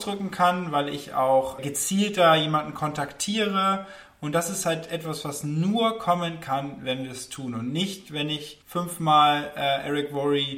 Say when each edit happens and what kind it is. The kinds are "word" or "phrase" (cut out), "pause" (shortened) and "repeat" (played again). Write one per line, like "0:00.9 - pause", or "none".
0:01.6 - word
0:08.6 - pause